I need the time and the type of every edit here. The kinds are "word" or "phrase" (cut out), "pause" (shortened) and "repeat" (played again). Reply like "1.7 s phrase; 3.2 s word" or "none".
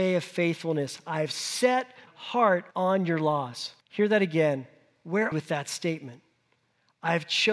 2.1 s word; 2.7 s pause; 3.8 s pause; 5.3 s phrase